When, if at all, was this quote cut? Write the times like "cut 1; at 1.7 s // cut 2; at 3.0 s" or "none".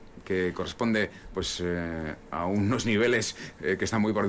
cut 1; at 1.3 s